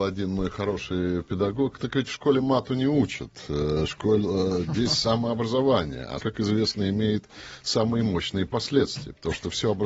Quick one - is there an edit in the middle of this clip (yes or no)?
yes